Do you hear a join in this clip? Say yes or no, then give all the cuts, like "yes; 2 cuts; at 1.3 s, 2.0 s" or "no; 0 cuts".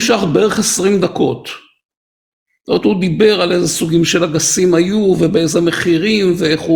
no; 0 cuts